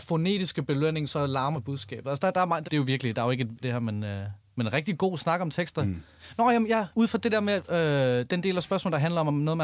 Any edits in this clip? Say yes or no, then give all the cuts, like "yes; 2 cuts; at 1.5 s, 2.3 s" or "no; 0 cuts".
yes; 4 cuts; at 1.5 s, 2.6 s, 3.6 s, 6.9 s